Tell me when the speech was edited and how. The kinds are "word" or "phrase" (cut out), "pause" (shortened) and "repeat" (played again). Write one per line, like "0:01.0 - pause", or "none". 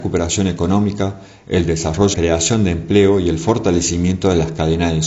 0:02.1 - phrase